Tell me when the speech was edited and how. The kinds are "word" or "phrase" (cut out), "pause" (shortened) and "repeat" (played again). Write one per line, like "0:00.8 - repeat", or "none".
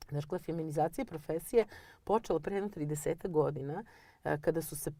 none